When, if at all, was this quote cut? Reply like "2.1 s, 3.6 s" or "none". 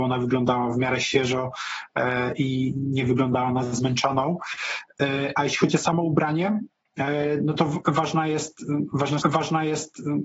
9.2 s